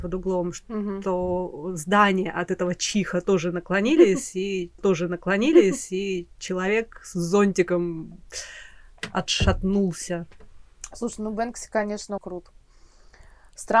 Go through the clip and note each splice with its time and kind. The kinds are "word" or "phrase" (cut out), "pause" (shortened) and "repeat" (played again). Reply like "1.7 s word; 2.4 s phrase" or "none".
4.8 s repeat; 12.2 s word

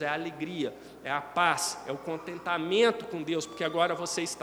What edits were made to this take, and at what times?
none

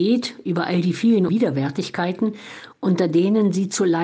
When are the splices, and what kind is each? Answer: 1.3 s word

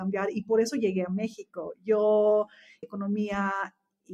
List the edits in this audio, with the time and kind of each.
2.8 s word

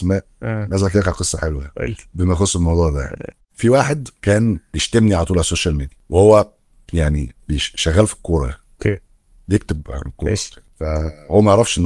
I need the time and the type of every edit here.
none

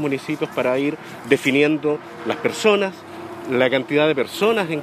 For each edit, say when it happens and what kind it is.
none

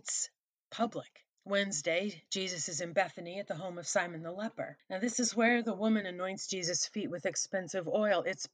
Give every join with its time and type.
1.3 s pause; 4.8 s pause

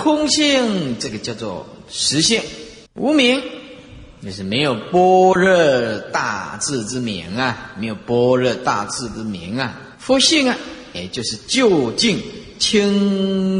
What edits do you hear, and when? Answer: 2.9 s pause; 9.9 s pause

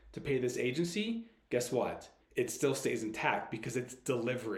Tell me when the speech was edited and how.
2.2 s pause

